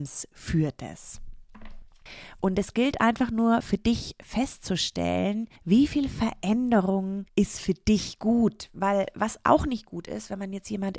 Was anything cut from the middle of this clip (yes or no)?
yes